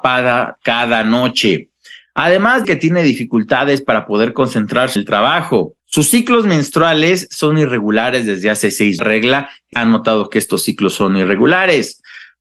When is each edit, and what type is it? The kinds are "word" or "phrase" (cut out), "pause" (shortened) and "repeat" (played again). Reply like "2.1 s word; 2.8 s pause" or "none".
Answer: 2.6 s word; 5.0 s word; 5.8 s pause; 9.0 s phrase; 9.7 s phrase